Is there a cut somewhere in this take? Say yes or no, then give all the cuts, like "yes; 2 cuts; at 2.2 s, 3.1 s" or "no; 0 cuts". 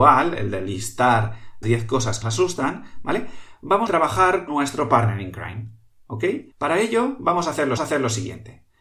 yes; 6 cuts; at 1.6 s, 2.2 s, 3.9 s, 4.5 s, 6.5 s, 7.8 s